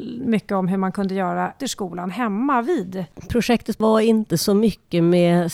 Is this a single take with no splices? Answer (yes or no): no